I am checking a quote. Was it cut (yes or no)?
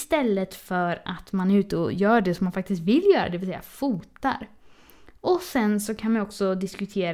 no